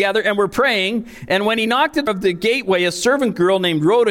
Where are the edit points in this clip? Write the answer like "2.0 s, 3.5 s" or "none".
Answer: 2.1 s